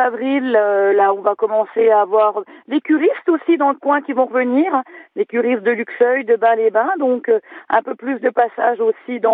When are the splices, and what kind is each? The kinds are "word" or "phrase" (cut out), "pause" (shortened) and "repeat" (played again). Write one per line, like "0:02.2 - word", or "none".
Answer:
none